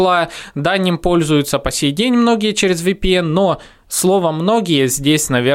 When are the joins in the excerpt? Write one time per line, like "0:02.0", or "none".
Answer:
none